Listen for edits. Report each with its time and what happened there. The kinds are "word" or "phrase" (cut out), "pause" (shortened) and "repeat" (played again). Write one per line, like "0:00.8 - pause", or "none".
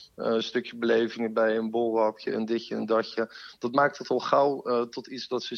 none